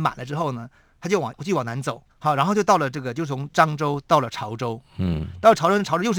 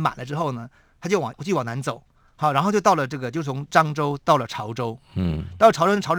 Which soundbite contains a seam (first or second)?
first